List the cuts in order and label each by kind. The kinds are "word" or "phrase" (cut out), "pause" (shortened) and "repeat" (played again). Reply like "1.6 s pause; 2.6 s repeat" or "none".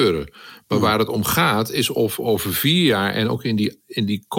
none